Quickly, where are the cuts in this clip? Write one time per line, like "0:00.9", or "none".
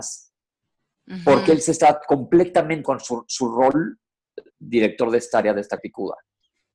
0:02.8
0:04.5
0:05.8